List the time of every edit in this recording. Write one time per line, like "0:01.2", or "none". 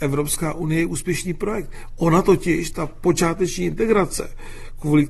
none